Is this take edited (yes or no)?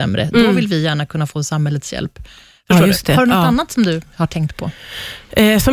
no